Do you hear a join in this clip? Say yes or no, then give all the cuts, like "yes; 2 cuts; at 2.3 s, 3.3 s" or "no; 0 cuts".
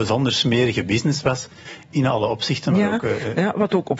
no; 0 cuts